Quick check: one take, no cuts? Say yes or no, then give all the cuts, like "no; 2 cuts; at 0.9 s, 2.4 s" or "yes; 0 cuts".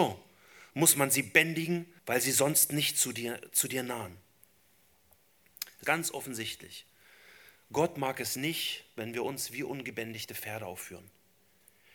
no; 2 cuts; at 2.0 s, 5.8 s